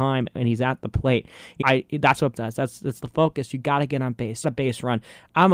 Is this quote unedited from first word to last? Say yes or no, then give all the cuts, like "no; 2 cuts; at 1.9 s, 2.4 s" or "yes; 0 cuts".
no; 4 cuts; at 1.6 s, 2.3 s, 3.0 s, 4.4 s